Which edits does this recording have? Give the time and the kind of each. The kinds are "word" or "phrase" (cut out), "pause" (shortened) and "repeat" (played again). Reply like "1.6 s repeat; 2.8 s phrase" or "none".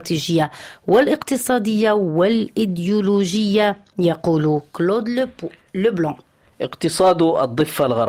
none

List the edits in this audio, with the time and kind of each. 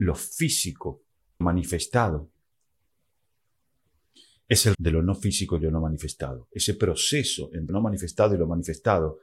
1.4 s word; 4.7 s word; 7.7 s word

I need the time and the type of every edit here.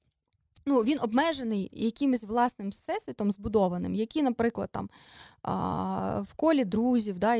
none

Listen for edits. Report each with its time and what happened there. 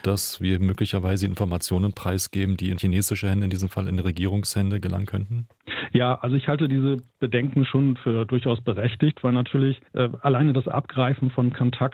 9.9 s pause

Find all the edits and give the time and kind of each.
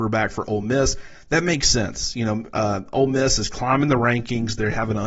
none

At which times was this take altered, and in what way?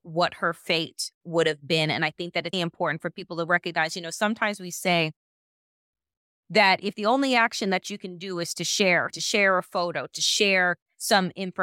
1.1 s word; 2.5 s word; 9.1 s word

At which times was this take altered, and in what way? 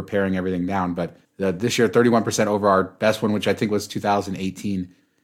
1.2 s pause

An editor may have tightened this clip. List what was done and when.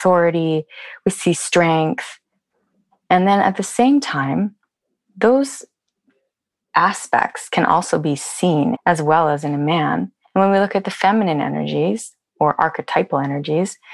8.8 s phrase

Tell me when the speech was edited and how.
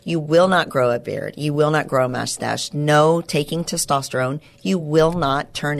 none

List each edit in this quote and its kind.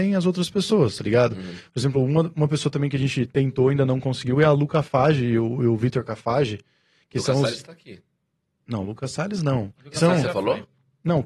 none

